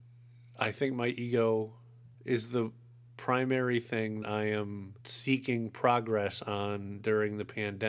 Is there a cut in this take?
yes; 3 cuts; at 2.1 s, 4.2 s, 5.0 s

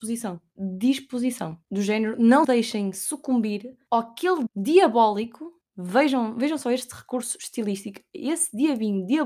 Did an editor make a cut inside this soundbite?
yes; 3 cuts; at 1.6 s, 2.4 s, 4.5 s

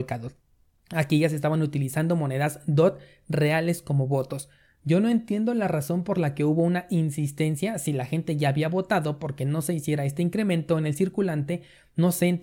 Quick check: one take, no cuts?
yes; 0 cuts

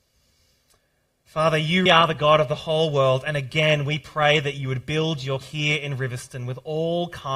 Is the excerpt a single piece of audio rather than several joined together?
no; 2 cuts; at 1.9 s, 5.4 s

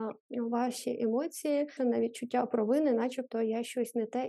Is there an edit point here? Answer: yes; 1 cut; at 1.8 s

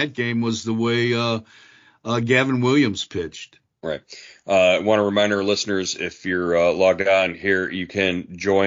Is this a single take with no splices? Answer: yes; 0 cuts

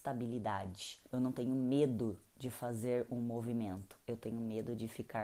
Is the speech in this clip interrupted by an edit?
yes; 1 cut; at 1.1 s

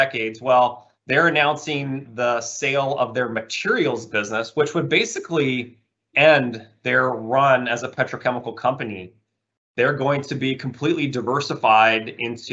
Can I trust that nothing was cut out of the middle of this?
no; 3 cuts; at 1.0 s, 2.1 s, 6.1 s

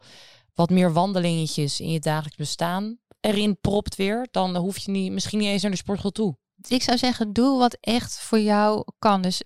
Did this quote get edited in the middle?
no; 0 cuts

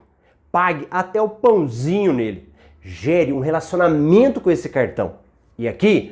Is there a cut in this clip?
no; 0 cuts

